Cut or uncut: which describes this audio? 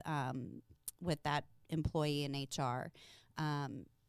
uncut